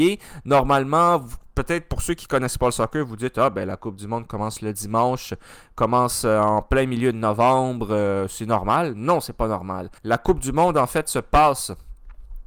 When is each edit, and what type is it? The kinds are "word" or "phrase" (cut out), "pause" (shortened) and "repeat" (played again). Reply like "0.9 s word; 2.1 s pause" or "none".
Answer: 10.0 s pause